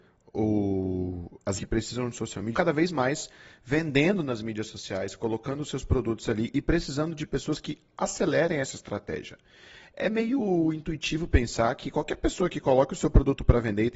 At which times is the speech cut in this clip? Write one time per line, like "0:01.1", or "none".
0:01.6
0:02.5